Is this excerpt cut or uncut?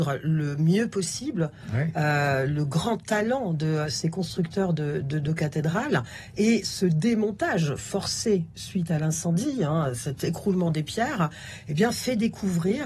uncut